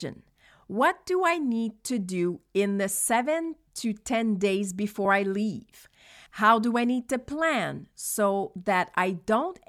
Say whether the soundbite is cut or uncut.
uncut